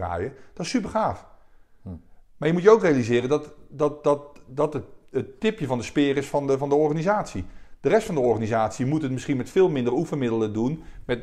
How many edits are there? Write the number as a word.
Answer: zero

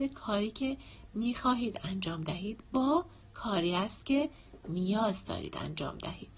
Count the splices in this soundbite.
zero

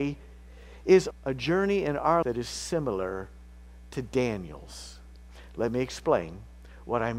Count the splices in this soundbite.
two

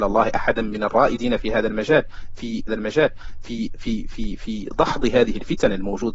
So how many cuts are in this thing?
one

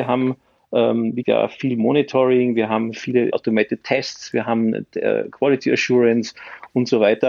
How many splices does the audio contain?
two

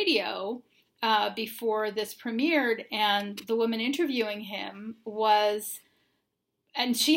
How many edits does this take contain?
zero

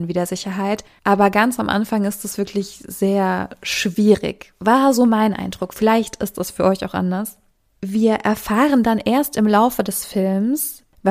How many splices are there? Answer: zero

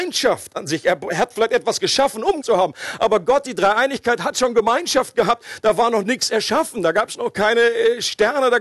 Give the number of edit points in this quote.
one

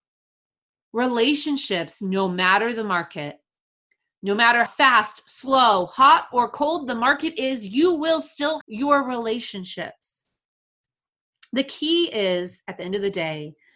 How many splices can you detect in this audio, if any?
two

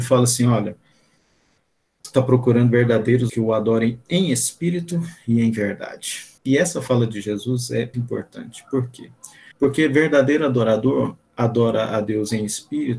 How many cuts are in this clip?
five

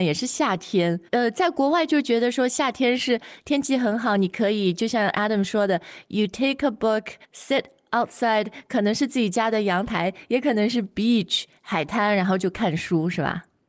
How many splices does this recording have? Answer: two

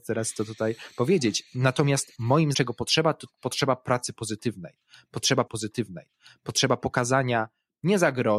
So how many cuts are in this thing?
two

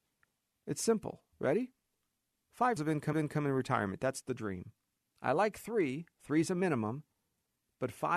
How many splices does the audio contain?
four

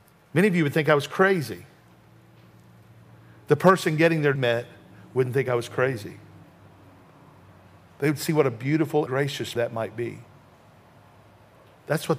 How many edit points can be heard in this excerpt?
three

